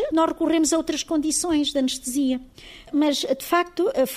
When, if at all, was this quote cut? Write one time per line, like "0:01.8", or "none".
none

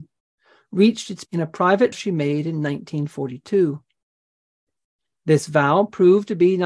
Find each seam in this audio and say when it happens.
0:01.3
0:01.9

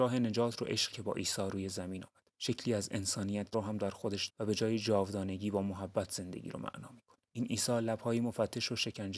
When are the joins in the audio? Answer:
0:00.9
0:02.3
0:03.5
0:04.3
0:07.3

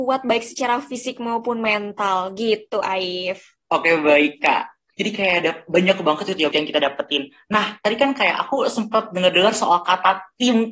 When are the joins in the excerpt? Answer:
0:03.6
0:04.9
0:06.5

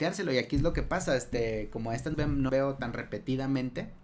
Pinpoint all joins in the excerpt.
0:02.1
0:02.5

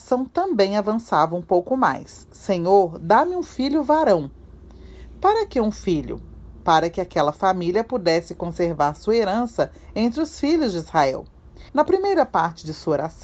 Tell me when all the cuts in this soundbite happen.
0:11.7

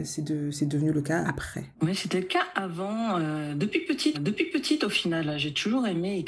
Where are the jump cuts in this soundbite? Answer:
0:01.2
0:01.7
0:04.1

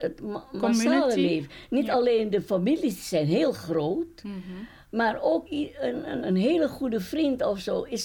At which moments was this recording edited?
0:05.5
0:06.2

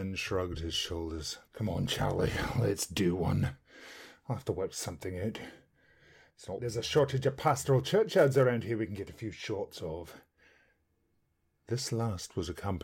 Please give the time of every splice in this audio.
0:01.5
0:06.6

